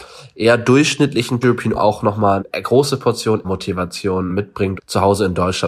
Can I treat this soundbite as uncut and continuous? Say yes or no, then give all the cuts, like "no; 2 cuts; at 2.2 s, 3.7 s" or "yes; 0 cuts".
no; 6 cuts; at 1.4 s, 1.8 s, 2.4 s, 3.4 s, 4.3 s, 4.8 s